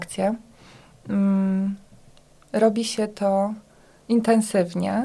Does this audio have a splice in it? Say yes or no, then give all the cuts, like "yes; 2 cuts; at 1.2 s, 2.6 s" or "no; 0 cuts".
no; 0 cuts